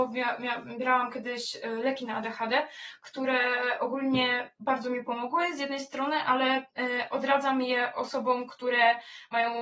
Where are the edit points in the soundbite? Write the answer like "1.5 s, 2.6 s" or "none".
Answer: 6.7 s